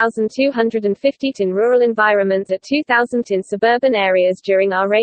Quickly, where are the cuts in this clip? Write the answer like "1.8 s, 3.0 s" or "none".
1.3 s, 2.5 s, 3.2 s